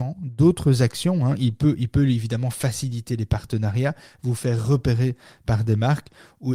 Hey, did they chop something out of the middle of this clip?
no; 0 cuts

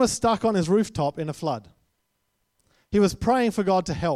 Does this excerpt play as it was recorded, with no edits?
yes; 0 cuts

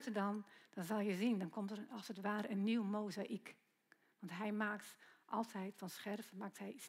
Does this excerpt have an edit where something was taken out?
no; 0 cuts

